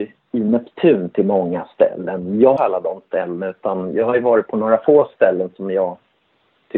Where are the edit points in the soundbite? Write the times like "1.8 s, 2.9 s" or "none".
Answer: 2.6 s